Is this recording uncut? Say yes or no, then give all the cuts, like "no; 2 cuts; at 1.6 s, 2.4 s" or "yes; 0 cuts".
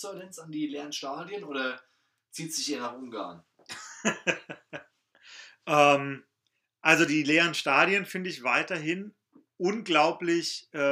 yes; 0 cuts